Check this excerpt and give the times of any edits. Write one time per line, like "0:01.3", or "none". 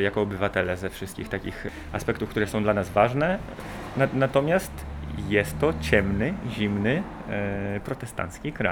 none